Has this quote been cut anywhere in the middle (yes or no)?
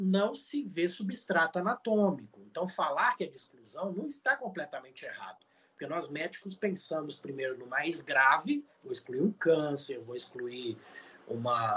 no